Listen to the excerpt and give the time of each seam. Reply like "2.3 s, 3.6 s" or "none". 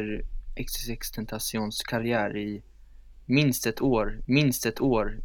4.2 s